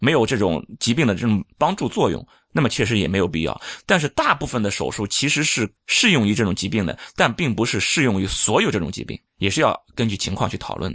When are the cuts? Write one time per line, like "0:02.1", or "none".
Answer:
0:01.5
0:05.8
0:09.3